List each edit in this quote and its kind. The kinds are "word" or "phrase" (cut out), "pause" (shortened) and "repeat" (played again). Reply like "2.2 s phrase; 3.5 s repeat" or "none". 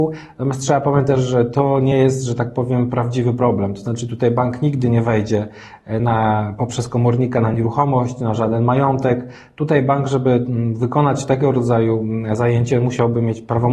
none